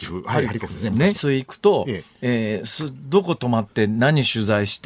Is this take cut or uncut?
cut